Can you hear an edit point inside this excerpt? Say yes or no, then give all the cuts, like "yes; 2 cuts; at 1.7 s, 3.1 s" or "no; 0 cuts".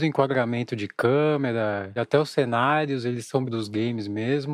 yes; 2 cuts; at 2.0 s, 3.4 s